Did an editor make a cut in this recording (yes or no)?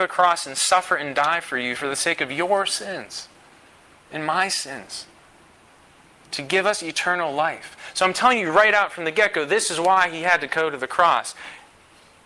no